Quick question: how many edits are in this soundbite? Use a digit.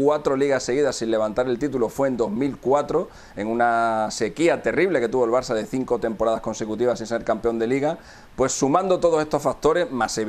0